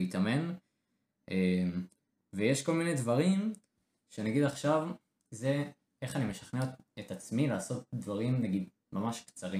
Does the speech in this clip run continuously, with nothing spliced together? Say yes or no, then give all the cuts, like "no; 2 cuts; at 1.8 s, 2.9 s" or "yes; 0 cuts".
yes; 0 cuts